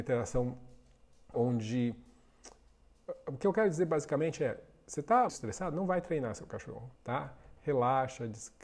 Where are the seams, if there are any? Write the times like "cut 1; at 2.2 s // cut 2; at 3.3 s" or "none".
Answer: cut 1; at 1.3 s // cut 2; at 5.3 s // cut 3; at 7.0 s